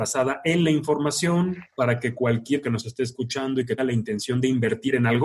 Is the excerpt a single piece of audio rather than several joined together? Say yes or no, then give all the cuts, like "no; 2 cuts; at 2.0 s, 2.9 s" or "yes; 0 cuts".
no; 3 cuts; at 1.7 s, 2.6 s, 3.8 s